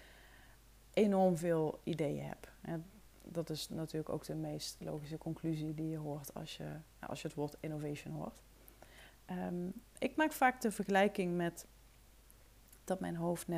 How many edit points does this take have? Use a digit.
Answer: 2